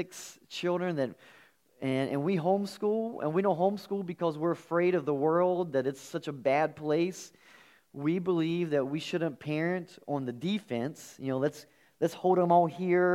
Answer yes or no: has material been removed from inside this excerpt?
no